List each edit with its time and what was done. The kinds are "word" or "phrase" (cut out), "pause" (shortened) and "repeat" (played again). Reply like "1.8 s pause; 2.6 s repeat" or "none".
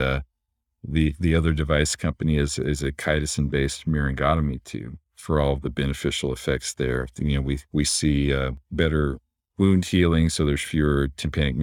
7.7 s pause; 8.6 s pause